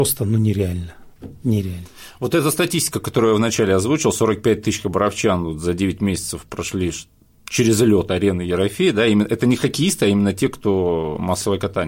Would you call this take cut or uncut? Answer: uncut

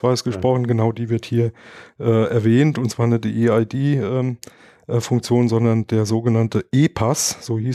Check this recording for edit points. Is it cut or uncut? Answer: uncut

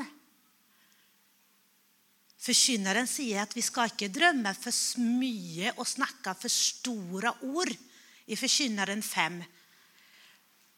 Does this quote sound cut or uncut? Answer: uncut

